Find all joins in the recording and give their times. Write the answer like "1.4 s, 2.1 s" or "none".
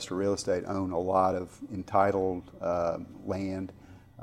none